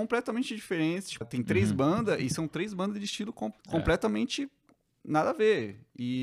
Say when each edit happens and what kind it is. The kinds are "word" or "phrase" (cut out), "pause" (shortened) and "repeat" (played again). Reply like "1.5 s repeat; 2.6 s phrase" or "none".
1.2 s word; 3.6 s pause